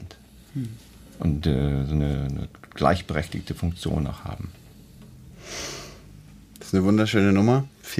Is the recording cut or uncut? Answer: uncut